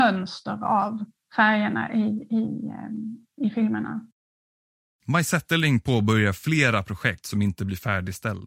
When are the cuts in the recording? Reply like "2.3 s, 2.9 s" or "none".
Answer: 1.2 s, 4.3 s